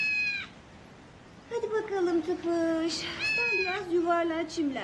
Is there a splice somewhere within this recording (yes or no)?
no